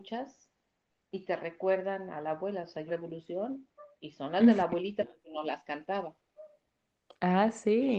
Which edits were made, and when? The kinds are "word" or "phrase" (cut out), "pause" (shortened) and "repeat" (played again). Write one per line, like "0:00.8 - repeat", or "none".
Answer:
0:02.9 - phrase